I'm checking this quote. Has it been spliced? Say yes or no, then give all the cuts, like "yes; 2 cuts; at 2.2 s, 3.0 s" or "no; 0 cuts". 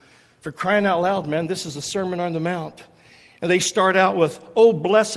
no; 0 cuts